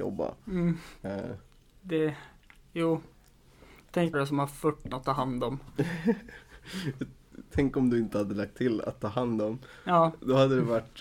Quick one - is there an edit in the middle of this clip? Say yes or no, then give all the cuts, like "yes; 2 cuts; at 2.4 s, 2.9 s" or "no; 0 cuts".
yes; 3 cuts; at 1.0 s, 4.1 s, 4.9 s